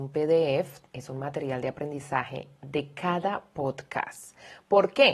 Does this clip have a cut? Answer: no; 0 cuts

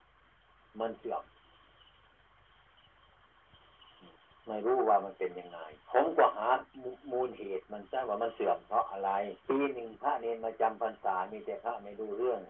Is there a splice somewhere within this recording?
yes; 3 cuts; at 4.2 s, 5.8 s, 9.4 s

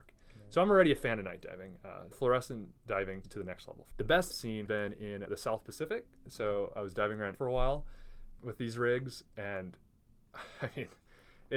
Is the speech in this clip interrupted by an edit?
yes; 8 cuts; at 2.1 s, 3.2 s, 3.9 s, 4.3 s, 4.7 s, 5.3 s, 7.3 s, 8.4 s

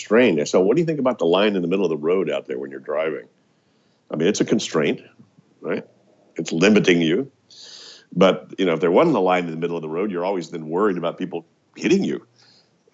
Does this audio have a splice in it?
no; 0 cuts

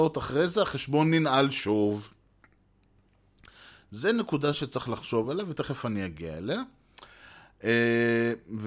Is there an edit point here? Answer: no; 0 cuts

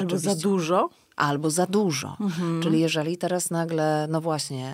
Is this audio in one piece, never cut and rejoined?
yes; 0 cuts

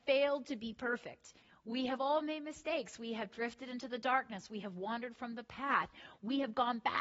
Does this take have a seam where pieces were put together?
no; 0 cuts

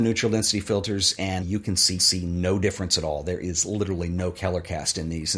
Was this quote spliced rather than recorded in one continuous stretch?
yes; 2 cuts; at 1.4 s, 2.0 s

